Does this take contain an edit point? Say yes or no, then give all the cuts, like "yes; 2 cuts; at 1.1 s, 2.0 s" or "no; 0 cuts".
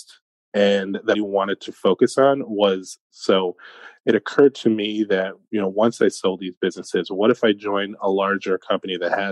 yes; 2 cuts; at 1.1 s, 3.1 s